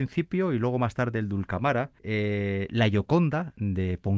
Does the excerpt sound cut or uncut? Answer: cut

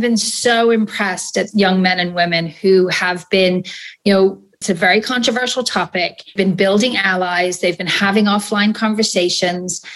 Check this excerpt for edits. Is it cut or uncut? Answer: cut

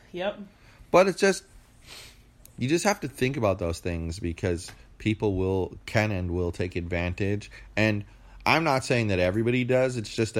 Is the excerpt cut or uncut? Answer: uncut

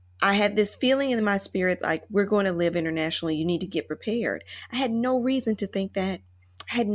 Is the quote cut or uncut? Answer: uncut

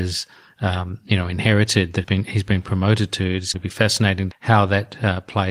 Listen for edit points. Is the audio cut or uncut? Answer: cut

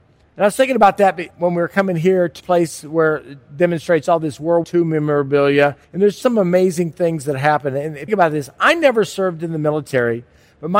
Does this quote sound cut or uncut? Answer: cut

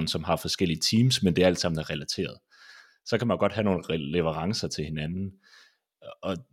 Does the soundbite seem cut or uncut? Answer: uncut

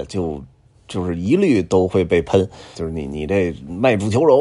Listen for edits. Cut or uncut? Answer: cut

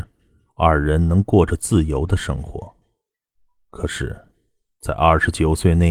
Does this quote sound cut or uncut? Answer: uncut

